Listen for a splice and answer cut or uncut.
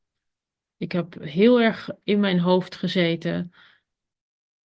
uncut